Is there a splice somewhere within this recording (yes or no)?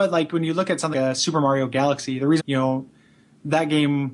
yes